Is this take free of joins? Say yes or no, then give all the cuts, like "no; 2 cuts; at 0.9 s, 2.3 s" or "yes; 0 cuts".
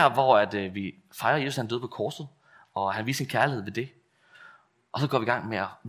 yes; 0 cuts